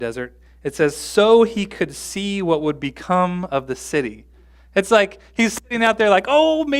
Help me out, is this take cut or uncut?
uncut